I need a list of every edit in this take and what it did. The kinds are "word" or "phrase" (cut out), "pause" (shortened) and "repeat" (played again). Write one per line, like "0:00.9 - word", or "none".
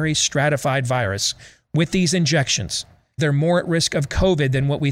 0:03.2 - word